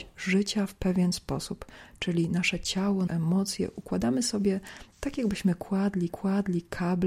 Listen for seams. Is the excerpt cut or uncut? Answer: cut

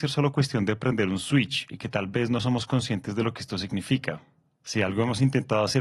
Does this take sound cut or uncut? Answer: uncut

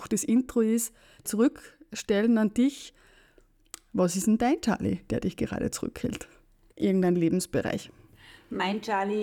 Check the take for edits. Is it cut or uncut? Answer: cut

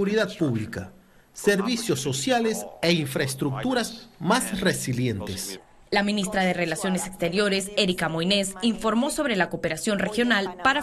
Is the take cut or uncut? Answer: uncut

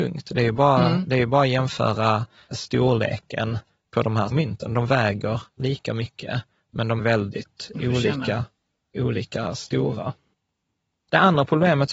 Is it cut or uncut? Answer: cut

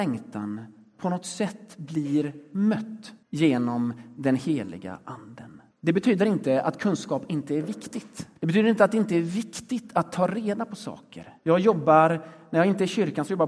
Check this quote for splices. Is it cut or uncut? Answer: cut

